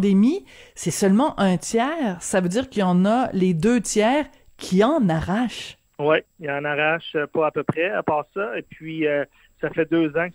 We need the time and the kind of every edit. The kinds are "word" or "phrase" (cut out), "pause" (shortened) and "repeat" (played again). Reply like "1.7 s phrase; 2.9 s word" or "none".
none